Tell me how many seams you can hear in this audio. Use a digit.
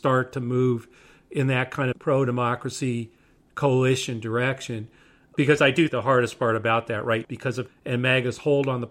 4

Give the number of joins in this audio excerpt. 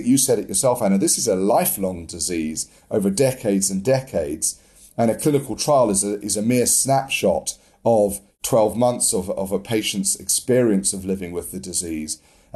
0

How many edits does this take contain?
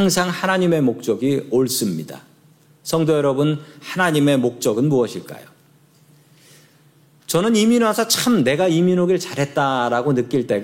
0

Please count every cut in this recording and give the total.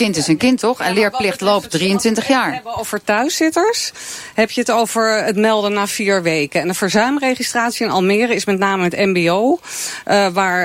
1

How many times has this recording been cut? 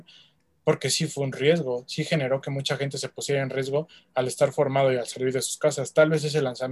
0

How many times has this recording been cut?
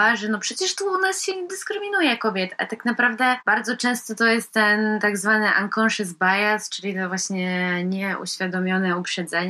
0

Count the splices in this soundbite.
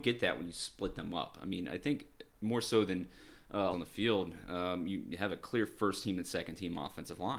1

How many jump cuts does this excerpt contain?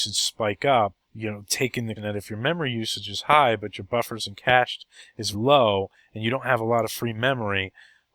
3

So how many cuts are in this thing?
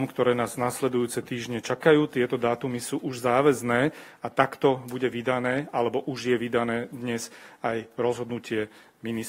0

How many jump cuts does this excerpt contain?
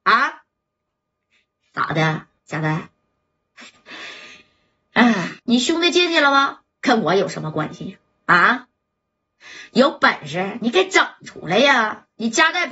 3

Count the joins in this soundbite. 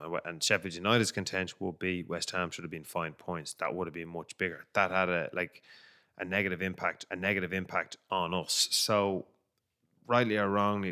2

